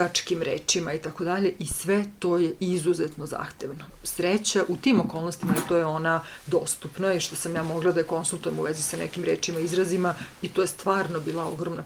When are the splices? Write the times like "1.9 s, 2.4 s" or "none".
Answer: 5.7 s